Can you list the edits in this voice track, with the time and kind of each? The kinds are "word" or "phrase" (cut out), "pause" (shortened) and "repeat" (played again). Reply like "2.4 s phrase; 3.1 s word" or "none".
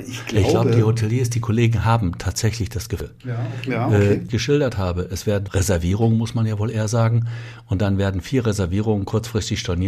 4.3 s phrase; 5.5 s phrase